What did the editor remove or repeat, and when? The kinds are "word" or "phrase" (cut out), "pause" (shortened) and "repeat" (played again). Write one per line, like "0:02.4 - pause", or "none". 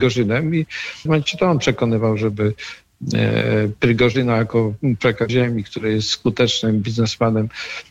0:01.1 - phrase
0:05.3 - phrase